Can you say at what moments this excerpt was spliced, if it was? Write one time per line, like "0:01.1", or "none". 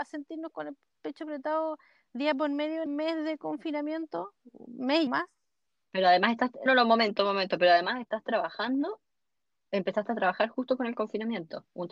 0:02.9
0:05.1
0:06.7